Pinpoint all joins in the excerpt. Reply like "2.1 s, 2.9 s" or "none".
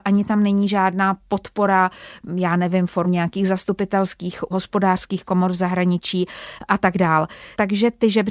3.0 s, 4.5 s